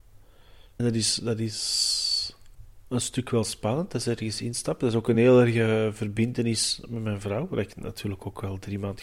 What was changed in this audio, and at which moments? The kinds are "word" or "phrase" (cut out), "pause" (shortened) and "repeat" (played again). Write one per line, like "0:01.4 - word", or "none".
none